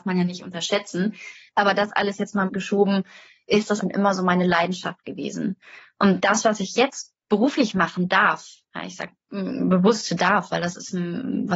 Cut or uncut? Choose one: cut